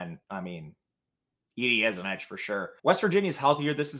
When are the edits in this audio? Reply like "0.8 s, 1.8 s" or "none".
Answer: 2.8 s